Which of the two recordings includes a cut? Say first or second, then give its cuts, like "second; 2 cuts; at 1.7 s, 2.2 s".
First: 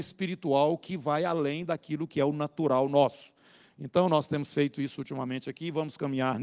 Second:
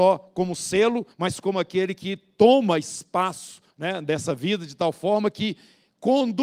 second; 2 cuts; at 1.1 s, 3.7 s